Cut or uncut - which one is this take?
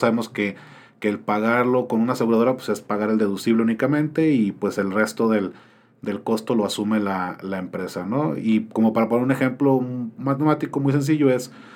uncut